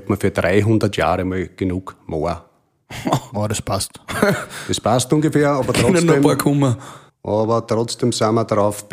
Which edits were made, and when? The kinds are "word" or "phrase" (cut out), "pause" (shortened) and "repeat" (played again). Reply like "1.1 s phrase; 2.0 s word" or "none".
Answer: 7.1 s pause